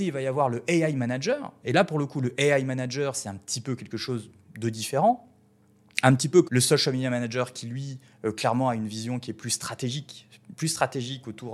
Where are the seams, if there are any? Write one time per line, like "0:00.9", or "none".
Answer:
0:06.4

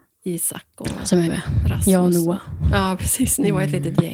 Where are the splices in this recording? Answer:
0:01.3

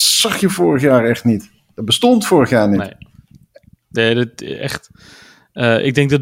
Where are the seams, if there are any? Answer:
none

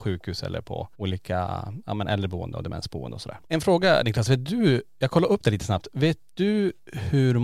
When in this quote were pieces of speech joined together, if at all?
0:00.9
0:03.4

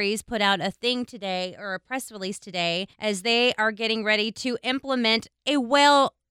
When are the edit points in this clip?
0:02.9

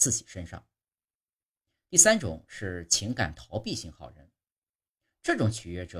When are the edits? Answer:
none

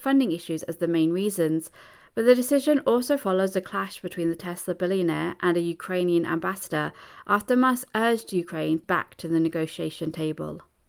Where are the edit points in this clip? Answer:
none

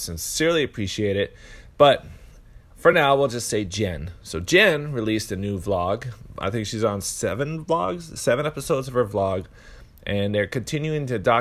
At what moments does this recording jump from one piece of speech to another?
none

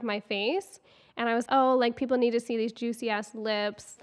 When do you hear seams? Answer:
0:01.5

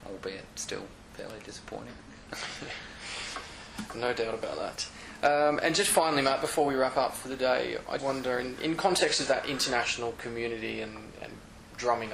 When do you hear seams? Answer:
0:08.0

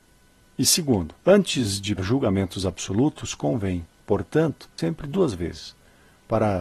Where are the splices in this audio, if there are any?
0:01.2
0:02.0
0:04.8

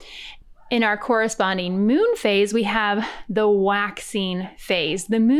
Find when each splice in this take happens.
none

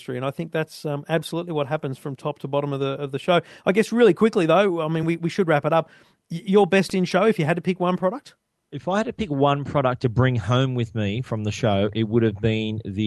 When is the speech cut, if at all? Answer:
none

